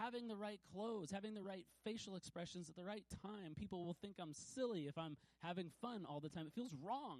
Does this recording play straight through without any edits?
yes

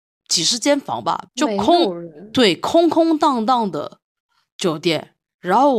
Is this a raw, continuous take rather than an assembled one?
no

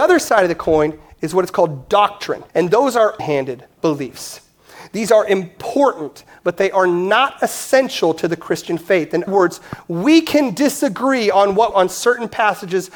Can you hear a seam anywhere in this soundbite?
yes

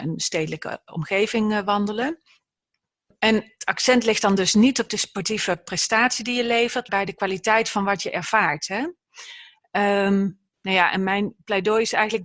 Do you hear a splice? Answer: yes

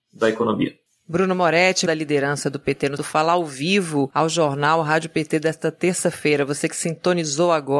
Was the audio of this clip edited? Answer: yes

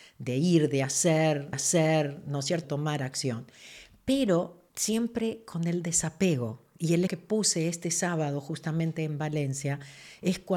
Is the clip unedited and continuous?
no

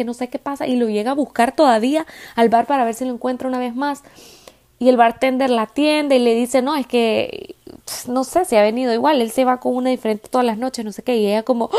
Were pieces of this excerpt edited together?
no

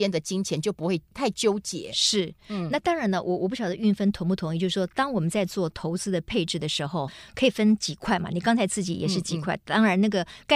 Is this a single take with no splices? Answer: no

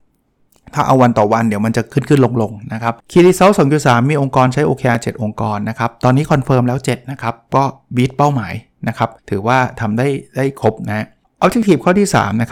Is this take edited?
yes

